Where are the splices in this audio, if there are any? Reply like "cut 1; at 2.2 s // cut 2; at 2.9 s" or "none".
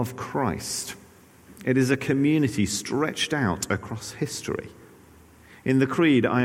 none